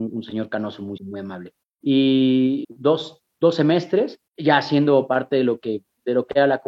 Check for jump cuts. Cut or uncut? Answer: cut